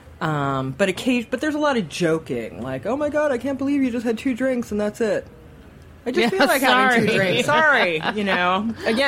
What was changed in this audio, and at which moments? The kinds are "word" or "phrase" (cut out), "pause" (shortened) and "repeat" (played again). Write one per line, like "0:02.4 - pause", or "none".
none